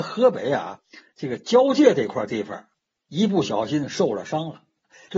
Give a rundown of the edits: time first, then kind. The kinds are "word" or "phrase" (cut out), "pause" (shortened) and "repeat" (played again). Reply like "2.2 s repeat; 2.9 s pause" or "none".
none